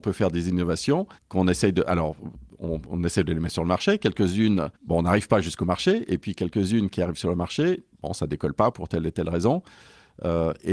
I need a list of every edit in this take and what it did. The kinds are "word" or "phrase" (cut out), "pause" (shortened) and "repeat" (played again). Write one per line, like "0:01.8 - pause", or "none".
0:01.2 - pause
0:04.8 - pause
0:07.9 - pause
0:08.7 - word